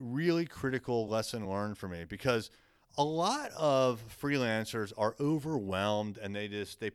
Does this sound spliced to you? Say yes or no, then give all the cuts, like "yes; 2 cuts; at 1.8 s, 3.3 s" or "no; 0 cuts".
no; 0 cuts